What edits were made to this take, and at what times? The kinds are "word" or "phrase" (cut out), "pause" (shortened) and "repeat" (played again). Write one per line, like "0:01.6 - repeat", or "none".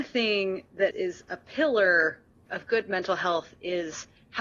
0:00.9 - word
0:02.5 - word